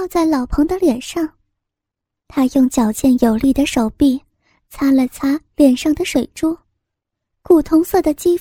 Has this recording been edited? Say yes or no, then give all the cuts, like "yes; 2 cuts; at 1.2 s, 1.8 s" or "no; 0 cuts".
no; 0 cuts